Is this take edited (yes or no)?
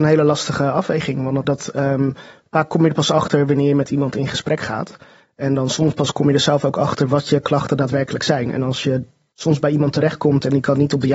yes